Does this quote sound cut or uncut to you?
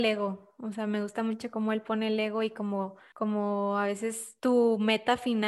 cut